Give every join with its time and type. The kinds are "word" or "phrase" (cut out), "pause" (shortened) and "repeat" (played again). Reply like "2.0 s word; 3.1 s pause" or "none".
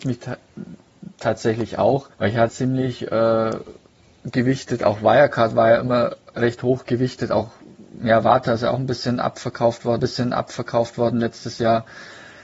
2.1 s pause; 2.5 s phrase; 10.0 s repeat